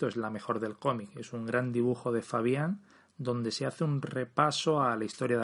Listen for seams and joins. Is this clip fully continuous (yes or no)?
yes